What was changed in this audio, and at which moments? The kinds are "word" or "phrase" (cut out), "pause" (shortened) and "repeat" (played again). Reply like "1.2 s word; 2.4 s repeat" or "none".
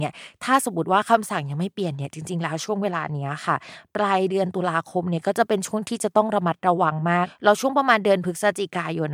none